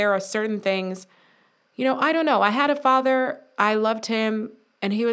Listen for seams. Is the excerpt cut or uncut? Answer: uncut